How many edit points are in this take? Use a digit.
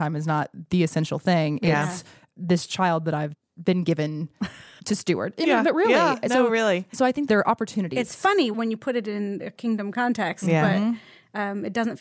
0